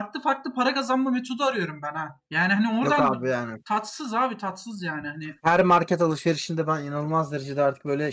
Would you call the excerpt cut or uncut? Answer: cut